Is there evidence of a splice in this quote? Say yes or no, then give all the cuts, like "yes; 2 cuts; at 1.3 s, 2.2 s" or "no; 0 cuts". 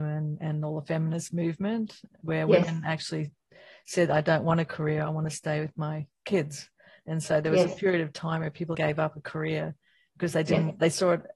yes; 1 cut; at 8.7 s